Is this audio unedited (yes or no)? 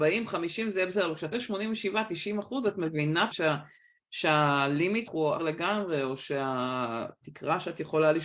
no